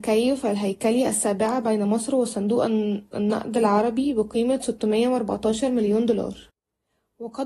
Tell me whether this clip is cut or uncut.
uncut